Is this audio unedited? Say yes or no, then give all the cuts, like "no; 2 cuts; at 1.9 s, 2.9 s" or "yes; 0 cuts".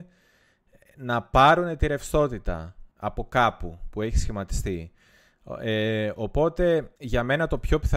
no; 2 cuts; at 2.9 s, 7.0 s